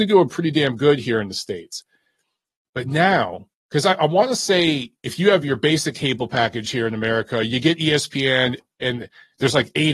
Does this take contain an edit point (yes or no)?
no